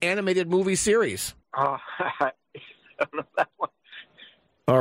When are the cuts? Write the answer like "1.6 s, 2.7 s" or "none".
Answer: 1.4 s